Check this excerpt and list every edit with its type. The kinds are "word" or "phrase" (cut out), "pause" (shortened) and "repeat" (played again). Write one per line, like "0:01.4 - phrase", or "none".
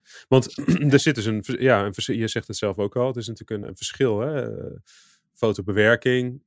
0:03.6 - word